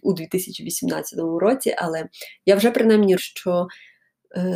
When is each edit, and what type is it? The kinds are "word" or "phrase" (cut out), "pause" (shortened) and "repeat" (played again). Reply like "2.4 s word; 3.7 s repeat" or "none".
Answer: 3.2 s word